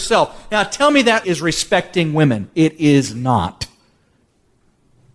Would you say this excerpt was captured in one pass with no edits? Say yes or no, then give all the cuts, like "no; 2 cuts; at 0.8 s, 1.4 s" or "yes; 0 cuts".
no; 1 cut; at 1.2 s